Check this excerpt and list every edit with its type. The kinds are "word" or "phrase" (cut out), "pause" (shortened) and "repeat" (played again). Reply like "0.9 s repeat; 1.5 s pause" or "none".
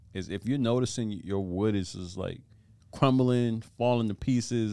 none